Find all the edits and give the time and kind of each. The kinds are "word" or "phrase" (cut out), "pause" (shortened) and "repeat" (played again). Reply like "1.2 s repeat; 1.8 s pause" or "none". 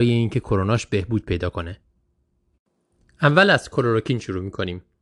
none